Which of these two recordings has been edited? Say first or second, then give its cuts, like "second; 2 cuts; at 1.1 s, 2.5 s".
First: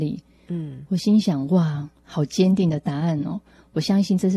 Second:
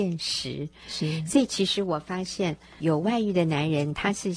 second; 1 cut; at 2.8 s